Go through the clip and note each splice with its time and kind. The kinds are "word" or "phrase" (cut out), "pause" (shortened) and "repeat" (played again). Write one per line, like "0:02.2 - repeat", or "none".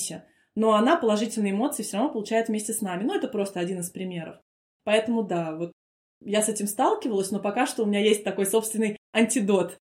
none